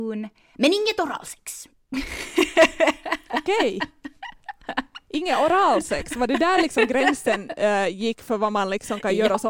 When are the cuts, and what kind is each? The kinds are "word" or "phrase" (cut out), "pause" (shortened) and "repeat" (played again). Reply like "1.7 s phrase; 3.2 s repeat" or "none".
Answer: 1.7 s pause